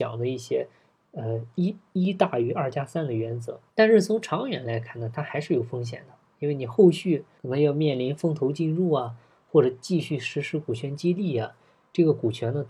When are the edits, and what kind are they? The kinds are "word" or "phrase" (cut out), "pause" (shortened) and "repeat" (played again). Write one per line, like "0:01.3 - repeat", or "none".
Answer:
0:03.7 - pause
0:07.4 - pause